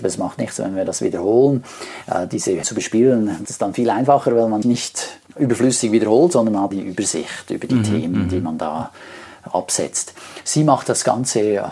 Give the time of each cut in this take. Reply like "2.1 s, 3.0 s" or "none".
2.6 s, 3.4 s, 4.6 s, 5.3 s, 6.7 s